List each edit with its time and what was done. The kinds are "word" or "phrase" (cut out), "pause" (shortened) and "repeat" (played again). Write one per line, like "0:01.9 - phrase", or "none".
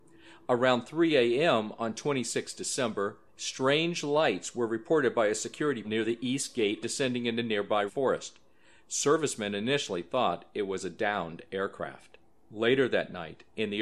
0:03.3 - pause
0:05.8 - word
0:06.8 - phrase
0:07.9 - word